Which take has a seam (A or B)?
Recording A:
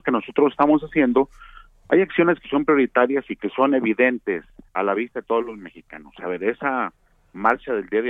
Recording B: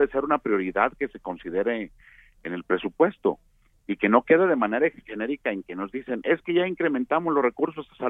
A